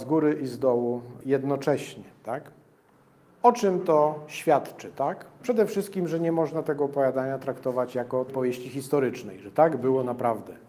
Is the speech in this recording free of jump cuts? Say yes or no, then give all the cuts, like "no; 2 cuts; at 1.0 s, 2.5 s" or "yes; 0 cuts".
no; 1 cut; at 8.3 s